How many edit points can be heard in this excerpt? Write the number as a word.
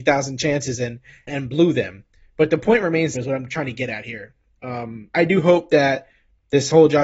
three